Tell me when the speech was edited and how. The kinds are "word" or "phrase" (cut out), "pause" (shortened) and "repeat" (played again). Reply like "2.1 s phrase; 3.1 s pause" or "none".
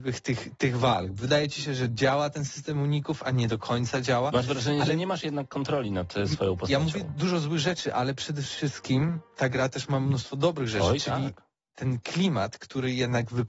none